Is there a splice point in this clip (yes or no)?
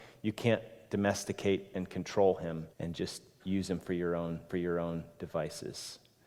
yes